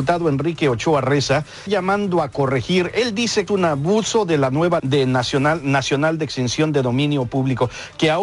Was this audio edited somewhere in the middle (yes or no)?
yes